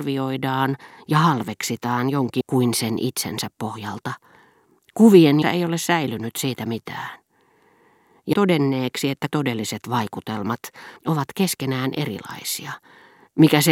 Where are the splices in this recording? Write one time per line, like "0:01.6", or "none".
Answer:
0:02.4
0:05.4
0:08.3
0:09.3
0:11.0